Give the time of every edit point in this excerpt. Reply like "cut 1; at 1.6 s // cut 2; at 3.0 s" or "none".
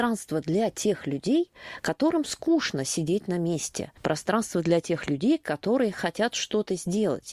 none